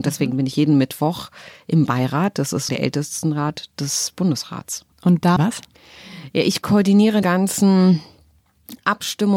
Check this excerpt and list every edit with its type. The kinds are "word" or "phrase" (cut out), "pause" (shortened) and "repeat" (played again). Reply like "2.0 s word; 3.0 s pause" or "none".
2.7 s word; 4.9 s pause; 5.4 s phrase; 7.2 s word